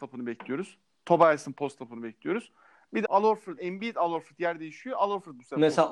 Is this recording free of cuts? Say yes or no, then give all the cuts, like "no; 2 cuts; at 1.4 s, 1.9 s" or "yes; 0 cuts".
no; 2 cuts; at 3.0 s, 3.6 s